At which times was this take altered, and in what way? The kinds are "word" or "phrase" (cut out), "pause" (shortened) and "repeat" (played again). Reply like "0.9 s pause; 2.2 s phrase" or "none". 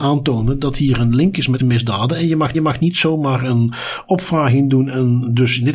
1.6 s word; 2.5 s repeat